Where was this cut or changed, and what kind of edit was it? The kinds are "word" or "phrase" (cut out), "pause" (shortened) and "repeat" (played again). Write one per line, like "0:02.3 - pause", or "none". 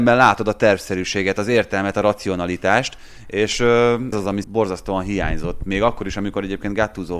0:04.1 - word
0:04.4 - word

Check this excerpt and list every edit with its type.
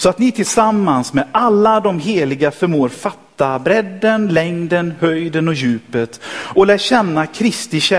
none

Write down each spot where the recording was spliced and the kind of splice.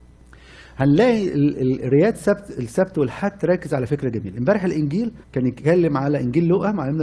0:05.2 - pause

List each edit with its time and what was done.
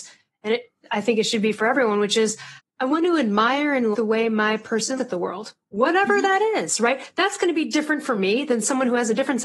0:02.6 - pause
0:03.9 - word
0:05.0 - word

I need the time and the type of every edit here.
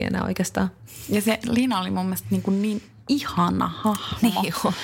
none

